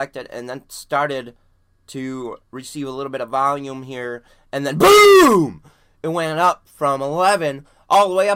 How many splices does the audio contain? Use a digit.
0